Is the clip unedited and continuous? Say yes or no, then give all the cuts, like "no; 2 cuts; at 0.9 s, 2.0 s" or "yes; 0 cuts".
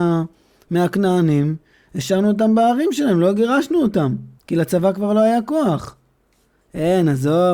no; 1 cut; at 4.4 s